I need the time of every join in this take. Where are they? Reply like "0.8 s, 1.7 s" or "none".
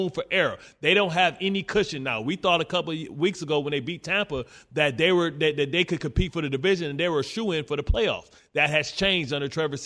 none